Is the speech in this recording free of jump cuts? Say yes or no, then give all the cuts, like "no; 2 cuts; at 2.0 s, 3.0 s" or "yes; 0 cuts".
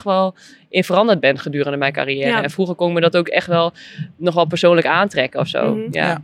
yes; 0 cuts